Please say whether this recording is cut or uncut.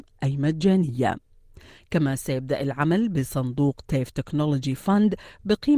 uncut